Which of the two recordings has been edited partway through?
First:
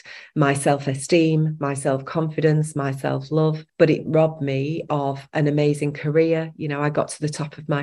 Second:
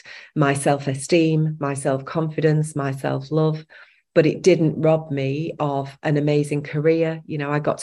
first; 2 cuts; at 3.7 s, 4.1 s

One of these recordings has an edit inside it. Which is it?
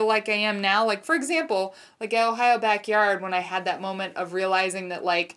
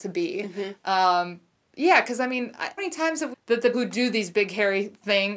second; 4 cuts; at 1.5 s, 2.8 s, 3.3 s, 3.7 s

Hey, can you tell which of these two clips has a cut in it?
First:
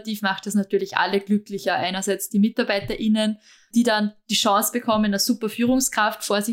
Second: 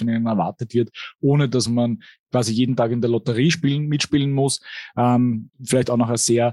first; 1 cut; at 3.7 s

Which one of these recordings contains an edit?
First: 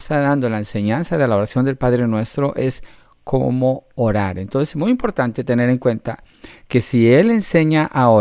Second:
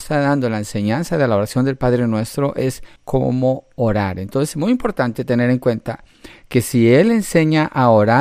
second; 1 cut; at 3.0 s

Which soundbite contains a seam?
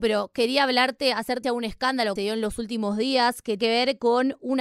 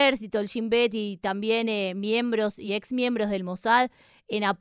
first; 3 cuts; at 1.4 s, 2.2 s, 3.6 s

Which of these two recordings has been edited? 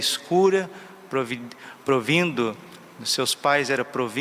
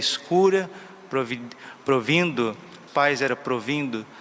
second; 1 cut; at 2.9 s

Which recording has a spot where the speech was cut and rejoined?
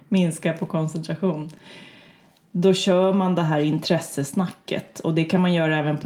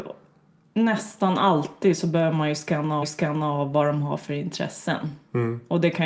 second; 1 cut; at 3.0 s

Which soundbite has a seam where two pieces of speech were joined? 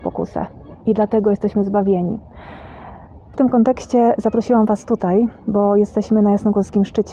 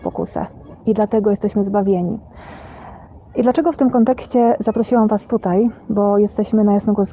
first; 1 cut; at 3.3 s

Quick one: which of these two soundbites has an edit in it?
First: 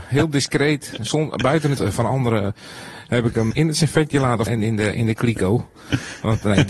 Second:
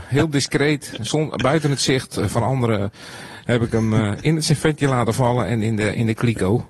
first; 3 cuts; at 1.8 s, 3.5 s, 4.5 s

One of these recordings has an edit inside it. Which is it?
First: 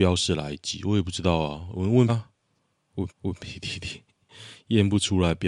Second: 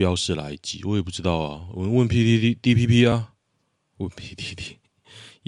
first; 2 cuts; at 2.1 s, 3.1 s

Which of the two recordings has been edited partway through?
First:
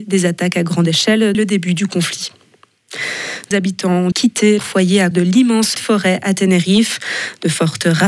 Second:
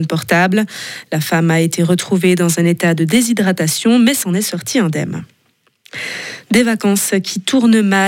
first; 6 cuts; at 1.3 s, 3.5 s, 4.1 s, 4.6 s, 5.1 s, 5.7 s

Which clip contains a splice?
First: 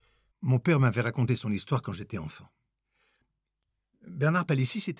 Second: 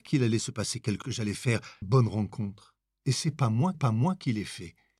second; 4 cuts; at 1.0 s, 1.8 s, 2.8 s, 3.7 s

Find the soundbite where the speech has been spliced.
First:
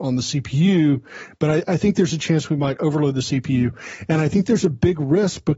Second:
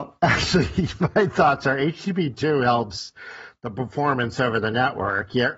first; 1 cut; at 1.6 s

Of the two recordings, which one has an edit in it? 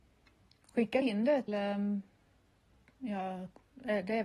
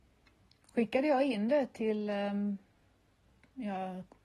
first; 2 cuts; at 1.0 s, 1.5 s

